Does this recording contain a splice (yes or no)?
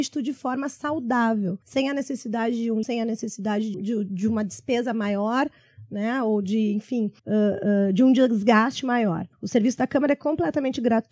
yes